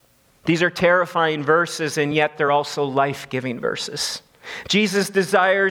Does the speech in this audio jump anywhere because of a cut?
no; 0 cuts

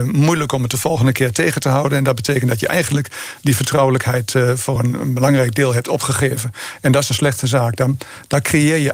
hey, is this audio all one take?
yes; 0 cuts

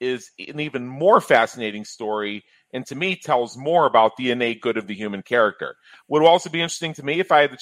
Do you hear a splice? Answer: no; 0 cuts

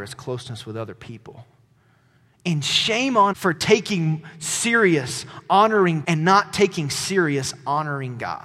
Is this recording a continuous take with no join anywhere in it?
no; 2 cuts; at 3.3 s, 6.0 s

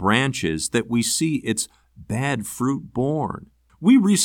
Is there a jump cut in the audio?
no; 0 cuts

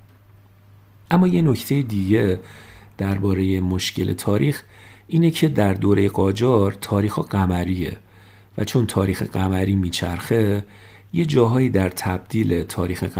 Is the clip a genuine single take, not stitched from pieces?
yes; 0 cuts

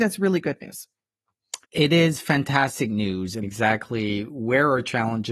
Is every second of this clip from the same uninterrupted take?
no; 2 cuts; at 1.6 s, 3.4 s

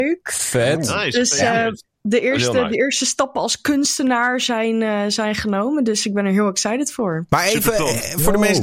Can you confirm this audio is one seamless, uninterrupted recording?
yes; 0 cuts

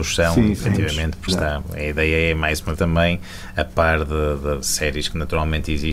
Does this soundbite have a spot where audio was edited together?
yes; 3 cuts; at 1.3 s, 2.8 s, 4.6 s

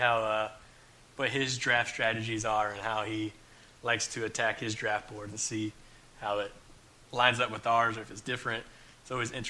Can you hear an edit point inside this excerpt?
no; 0 cuts

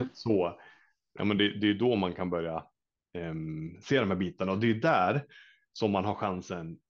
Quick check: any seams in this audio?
no; 0 cuts

